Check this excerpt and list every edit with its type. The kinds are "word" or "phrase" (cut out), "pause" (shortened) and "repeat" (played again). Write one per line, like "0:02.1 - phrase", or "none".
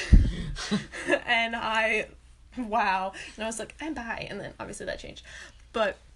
none